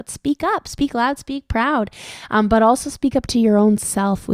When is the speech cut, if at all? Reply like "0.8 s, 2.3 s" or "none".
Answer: none